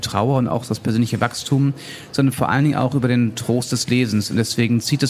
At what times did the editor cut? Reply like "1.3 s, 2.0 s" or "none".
none

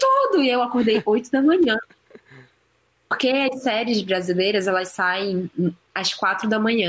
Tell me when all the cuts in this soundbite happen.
none

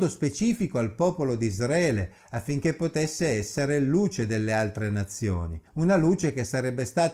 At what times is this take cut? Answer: 5.7 s

